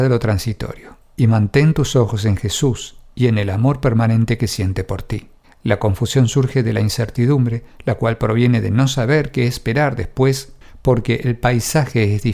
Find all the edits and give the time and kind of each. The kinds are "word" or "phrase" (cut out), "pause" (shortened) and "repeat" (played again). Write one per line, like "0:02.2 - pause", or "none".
0:05.4 - pause